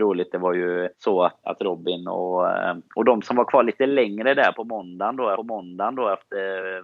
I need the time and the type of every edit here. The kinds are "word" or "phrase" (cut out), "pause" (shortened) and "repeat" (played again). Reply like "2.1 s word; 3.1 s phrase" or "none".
0.9 s pause; 1.4 s word; 4.5 s word; 5.4 s repeat